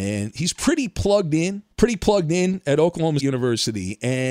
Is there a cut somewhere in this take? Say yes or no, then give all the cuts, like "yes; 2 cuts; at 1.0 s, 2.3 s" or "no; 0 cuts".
yes; 2 cuts; at 1.7 s, 3.2 s